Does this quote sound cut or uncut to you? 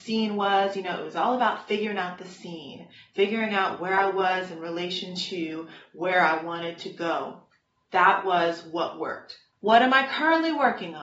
uncut